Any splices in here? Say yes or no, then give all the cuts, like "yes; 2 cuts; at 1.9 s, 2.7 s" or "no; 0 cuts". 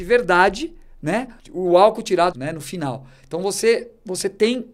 yes; 2 cuts; at 1.4 s, 2.3 s